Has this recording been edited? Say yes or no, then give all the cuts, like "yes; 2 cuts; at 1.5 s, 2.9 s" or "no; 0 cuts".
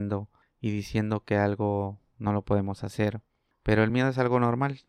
no; 0 cuts